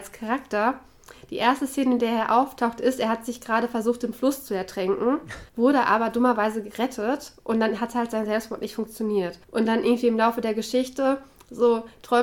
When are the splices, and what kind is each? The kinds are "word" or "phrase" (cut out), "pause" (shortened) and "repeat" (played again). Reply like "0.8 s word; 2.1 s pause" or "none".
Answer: 5.5 s pause; 9.4 s pause